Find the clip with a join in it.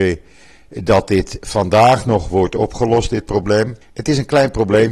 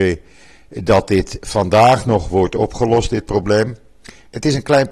first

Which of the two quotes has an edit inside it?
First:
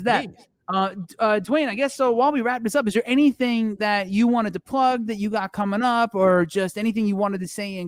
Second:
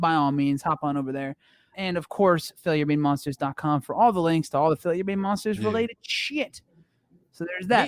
second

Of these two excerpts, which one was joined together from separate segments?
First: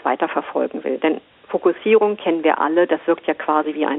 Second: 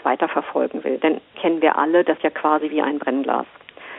second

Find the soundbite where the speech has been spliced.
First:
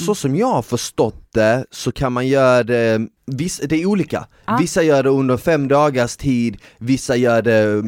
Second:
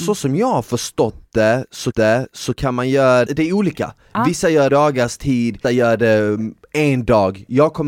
second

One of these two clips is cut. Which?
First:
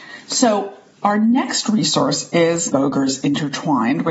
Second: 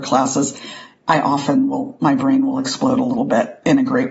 first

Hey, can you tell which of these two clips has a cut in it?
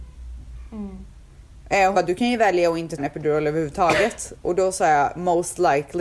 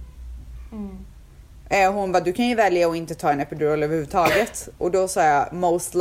first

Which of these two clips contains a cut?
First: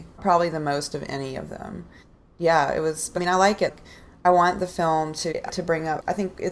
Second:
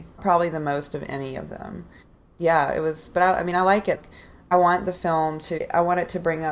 first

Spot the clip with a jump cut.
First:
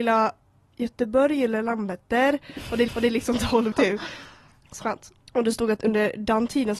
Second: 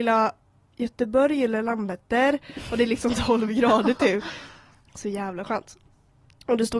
first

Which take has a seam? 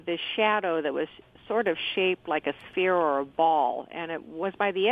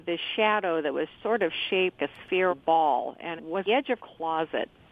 second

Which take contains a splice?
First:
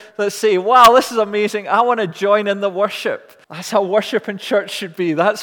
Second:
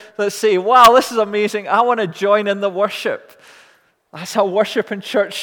first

